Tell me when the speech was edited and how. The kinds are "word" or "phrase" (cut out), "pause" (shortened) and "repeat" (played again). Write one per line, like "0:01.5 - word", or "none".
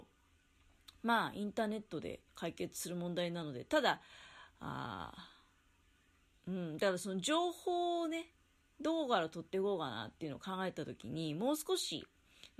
0:02.3 - pause